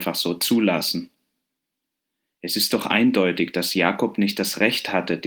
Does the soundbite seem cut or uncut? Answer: uncut